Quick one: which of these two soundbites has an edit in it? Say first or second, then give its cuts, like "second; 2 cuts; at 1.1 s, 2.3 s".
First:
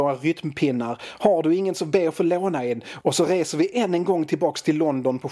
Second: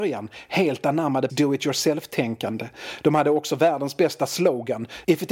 second; 1 cut; at 1.3 s